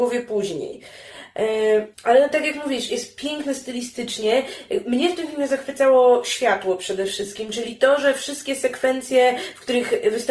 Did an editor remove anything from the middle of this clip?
yes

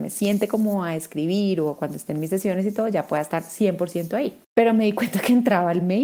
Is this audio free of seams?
no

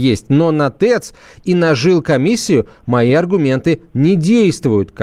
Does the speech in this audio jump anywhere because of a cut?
no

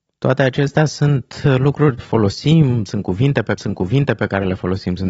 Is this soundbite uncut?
no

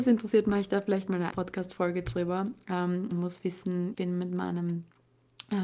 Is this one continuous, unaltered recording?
no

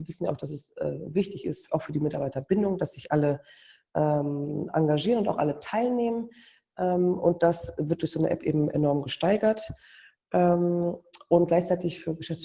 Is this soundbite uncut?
yes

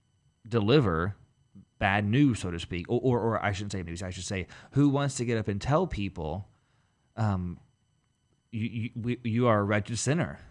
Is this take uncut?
no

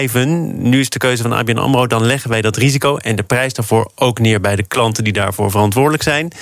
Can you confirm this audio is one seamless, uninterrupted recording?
yes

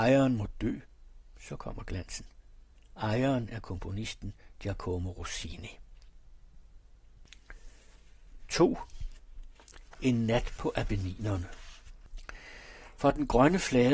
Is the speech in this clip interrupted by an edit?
no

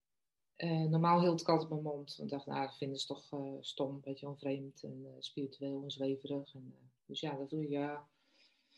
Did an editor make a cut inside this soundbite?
yes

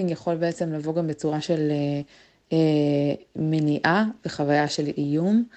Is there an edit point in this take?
no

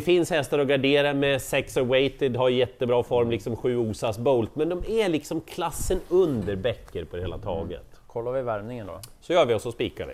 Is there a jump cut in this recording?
no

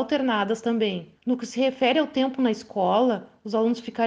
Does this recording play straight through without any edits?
no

